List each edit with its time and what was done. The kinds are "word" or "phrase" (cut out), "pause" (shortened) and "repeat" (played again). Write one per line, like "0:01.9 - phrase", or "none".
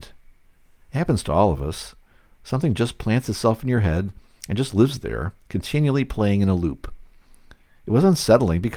none